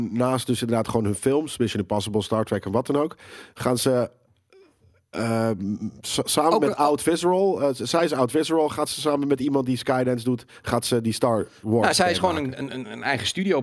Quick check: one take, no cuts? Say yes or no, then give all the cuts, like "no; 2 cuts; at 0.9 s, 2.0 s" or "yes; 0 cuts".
yes; 0 cuts